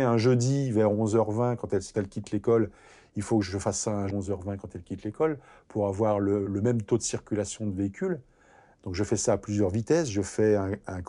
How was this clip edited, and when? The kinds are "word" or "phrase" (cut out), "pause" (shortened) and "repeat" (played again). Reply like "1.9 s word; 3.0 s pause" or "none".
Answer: 1.9 s word; 4.1 s word; 6.5 s word